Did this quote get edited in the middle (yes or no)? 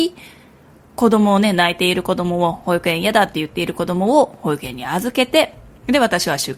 no